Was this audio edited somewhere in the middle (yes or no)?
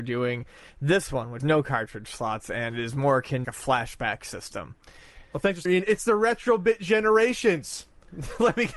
yes